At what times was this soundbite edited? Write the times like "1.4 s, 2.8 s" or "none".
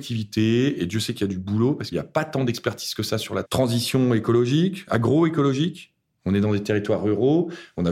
1.9 s, 3.4 s